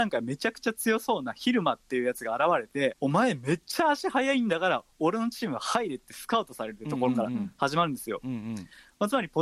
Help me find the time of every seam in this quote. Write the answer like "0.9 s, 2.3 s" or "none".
2.9 s